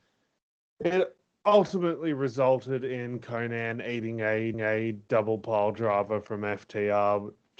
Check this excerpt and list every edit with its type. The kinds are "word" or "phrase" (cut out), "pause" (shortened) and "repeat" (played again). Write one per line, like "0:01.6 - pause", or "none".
0:01.4 - pause
0:04.5 - repeat